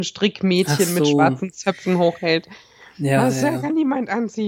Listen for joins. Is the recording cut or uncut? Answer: uncut